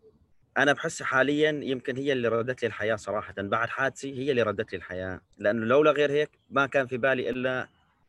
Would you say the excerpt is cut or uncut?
cut